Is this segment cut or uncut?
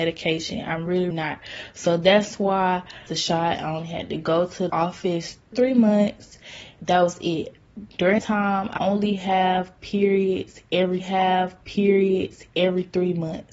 cut